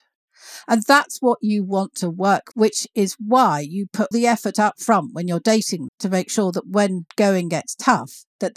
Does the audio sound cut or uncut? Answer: cut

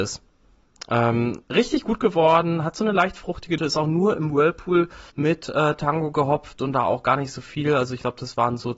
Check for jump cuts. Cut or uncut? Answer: cut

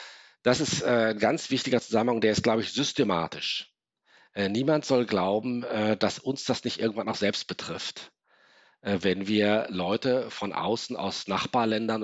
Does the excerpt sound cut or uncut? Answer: uncut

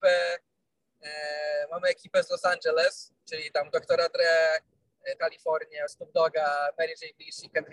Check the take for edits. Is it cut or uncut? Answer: cut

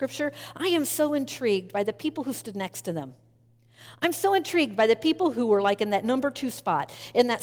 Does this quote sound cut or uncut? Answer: uncut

